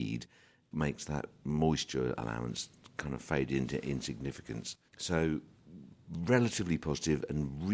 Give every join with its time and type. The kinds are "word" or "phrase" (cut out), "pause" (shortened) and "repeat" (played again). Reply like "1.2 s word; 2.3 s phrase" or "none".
4.9 s pause

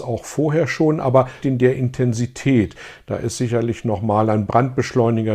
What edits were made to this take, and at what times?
1.4 s word

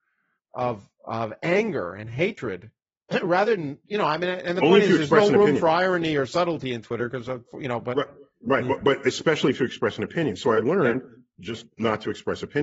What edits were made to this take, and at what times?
2.8 s pause

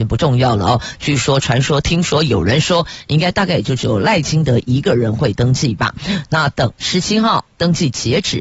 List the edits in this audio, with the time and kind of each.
6.7 s pause

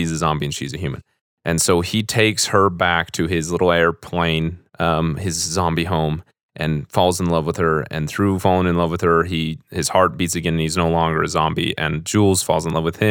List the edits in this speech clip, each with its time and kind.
4.7 s pause

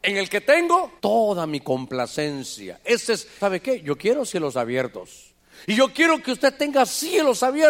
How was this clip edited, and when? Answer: 1.0 s pause; 3.4 s word

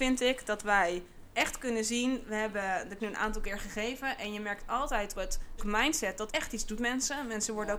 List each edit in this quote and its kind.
1.3 s pause; 3.0 s word; 5.1 s word; 5.6 s word; 6.3 s word; 6.8 s word

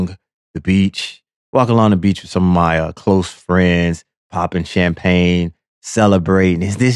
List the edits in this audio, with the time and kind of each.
none

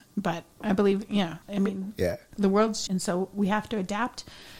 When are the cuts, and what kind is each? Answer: 1.4 s pause; 2.9 s word

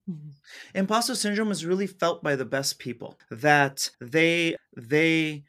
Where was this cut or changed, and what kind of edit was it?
3.9 s pause

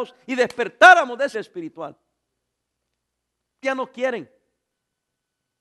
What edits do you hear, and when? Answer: 1.3 s word; 3.6 s word

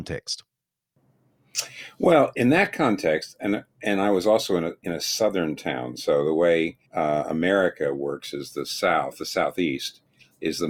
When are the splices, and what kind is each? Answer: 6.8 s pause

